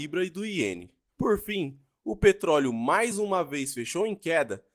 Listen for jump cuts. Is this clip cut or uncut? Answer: uncut